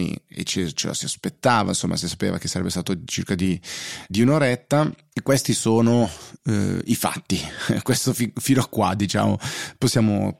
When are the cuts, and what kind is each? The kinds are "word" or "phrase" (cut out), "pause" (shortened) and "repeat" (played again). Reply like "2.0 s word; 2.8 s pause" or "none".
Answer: 4.1 s word